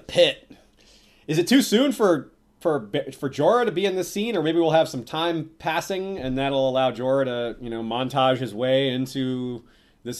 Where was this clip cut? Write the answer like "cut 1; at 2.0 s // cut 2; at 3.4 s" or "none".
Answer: none